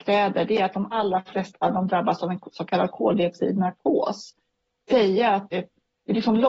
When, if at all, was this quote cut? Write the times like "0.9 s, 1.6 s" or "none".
0.9 s, 4.9 s, 5.5 s